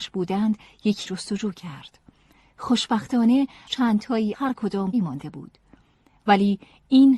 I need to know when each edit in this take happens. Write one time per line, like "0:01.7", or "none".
0:01.0
0:03.7
0:04.3
0:04.9